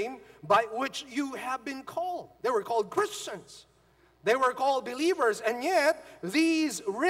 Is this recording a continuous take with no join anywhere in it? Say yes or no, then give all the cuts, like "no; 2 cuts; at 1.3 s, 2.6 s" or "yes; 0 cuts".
no; 1 cut; at 2.3 s